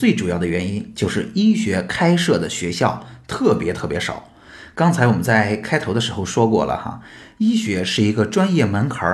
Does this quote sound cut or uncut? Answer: uncut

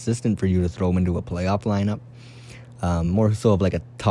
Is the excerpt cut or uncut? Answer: uncut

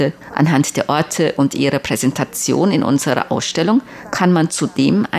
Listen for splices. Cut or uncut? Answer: uncut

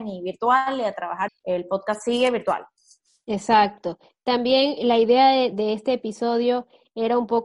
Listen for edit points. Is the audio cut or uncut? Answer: cut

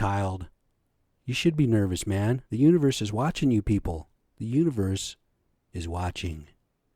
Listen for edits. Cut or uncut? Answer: cut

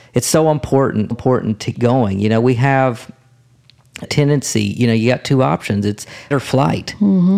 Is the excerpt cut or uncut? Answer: cut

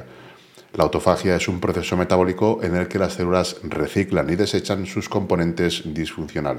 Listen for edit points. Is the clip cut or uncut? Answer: uncut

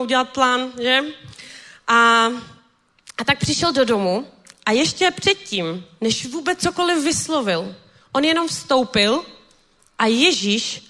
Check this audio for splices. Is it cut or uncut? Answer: uncut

